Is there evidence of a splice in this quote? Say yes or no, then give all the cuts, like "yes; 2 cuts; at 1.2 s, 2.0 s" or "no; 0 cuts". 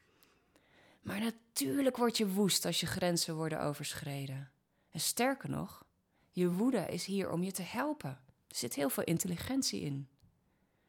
no; 0 cuts